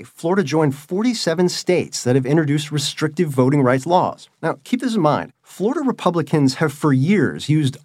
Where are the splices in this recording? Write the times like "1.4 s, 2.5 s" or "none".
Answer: none